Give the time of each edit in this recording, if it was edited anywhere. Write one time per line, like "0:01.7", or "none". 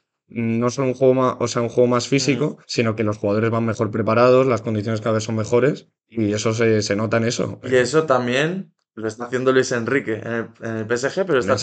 0:02.6
0:06.0